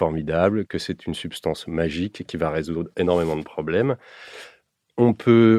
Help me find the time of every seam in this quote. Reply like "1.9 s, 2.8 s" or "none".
none